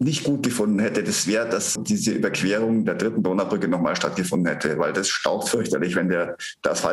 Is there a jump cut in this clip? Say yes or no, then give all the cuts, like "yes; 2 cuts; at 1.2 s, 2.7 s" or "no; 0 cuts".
yes; 1 cut; at 1.8 s